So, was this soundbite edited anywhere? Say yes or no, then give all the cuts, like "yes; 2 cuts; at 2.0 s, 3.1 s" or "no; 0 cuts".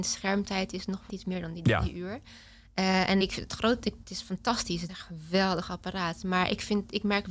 yes; 4 cuts; at 1.1 s, 3.2 s, 4.0 s, 4.9 s